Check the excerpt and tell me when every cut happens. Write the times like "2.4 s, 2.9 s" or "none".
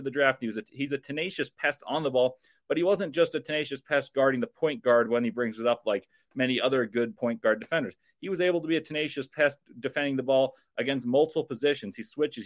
none